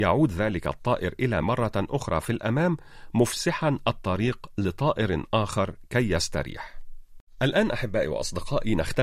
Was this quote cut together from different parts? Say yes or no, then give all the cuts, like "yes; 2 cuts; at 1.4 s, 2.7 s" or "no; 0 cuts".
yes; 2 cuts; at 1.4 s, 7.3 s